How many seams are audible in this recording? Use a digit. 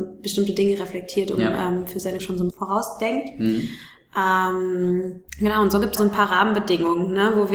4